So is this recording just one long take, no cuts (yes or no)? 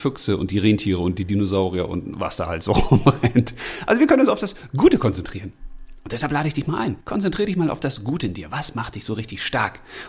no